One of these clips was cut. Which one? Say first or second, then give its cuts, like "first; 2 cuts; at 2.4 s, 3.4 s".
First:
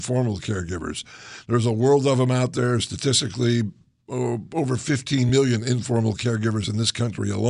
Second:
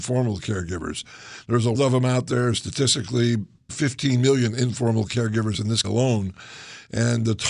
second; 3 cuts; at 1.7 s, 3.7 s, 5.8 s